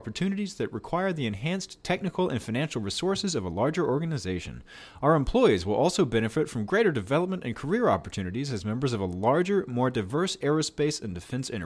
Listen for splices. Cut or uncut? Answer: uncut